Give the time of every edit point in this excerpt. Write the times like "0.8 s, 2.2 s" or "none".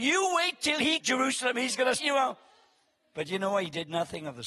1.0 s, 2.0 s